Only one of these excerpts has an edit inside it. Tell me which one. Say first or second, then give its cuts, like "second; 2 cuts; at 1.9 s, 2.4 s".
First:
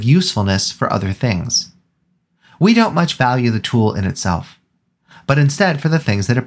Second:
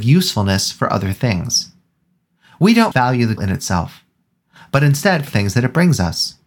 second; 3 cuts; at 2.9 s, 3.4 s, 5.3 s